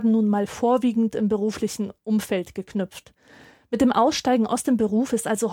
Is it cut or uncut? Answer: uncut